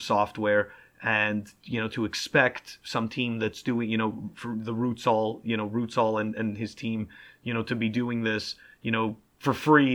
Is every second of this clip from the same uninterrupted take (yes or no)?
yes